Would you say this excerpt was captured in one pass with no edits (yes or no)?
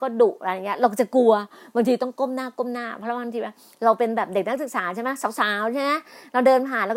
yes